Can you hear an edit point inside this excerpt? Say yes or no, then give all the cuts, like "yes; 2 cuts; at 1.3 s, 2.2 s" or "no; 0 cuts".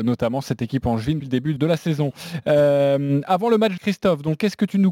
yes; 3 cuts; at 1.2 s, 1.6 s, 3.8 s